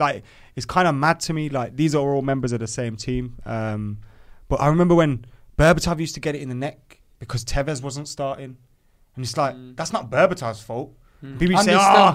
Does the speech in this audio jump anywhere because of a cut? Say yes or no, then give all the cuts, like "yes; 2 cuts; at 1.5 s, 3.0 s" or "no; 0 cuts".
no; 0 cuts